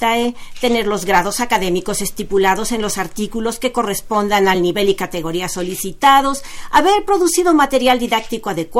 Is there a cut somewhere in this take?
no; 0 cuts

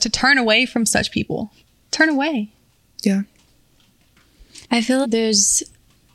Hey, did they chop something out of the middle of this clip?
yes; 3 cuts; at 1.6 s, 4.6 s, 5.0 s

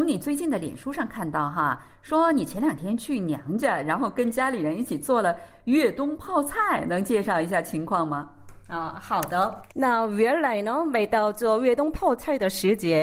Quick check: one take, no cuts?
yes; 0 cuts

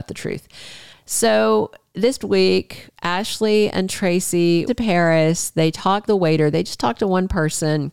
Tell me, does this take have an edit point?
yes; 3 cuts; at 2.2 s, 4.7 s, 6.1 s

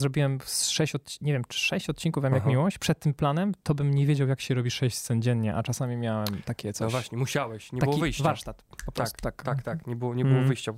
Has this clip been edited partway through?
no; 0 cuts

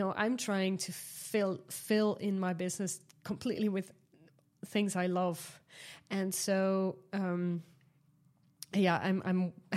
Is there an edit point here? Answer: no; 0 cuts

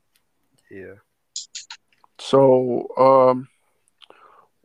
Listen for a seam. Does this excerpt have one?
yes; 1 cut; at 1.9 s

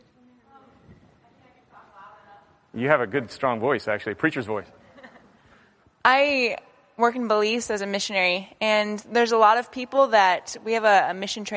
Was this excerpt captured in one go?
no; 1 cut; at 5.8 s

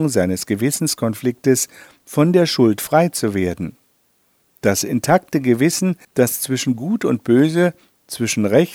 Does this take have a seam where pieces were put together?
yes; 1 cut; at 6.0 s

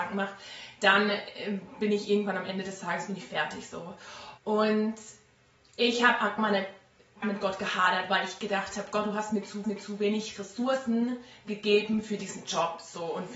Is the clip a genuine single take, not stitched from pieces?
no; 4 cuts; at 4.4 s, 6.4 s, 7.2 s, 9.6 s

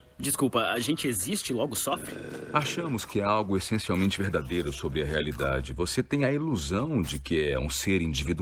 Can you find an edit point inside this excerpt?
no; 0 cuts

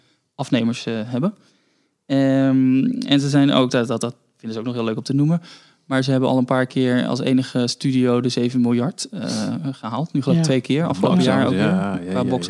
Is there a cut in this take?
no; 0 cuts

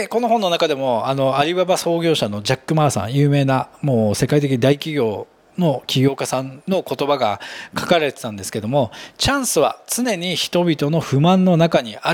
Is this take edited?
no; 0 cuts

